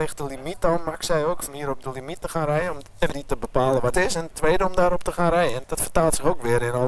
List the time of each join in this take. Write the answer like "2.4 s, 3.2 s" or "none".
1.5 s, 3.1 s, 3.9 s, 4.3 s, 5.6 s